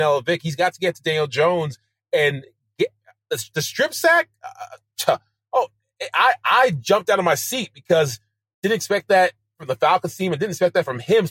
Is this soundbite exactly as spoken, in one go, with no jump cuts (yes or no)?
yes